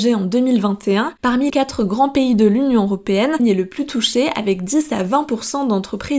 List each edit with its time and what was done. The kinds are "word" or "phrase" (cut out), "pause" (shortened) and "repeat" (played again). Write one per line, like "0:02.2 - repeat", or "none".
0:01.5 - word
0:03.4 - word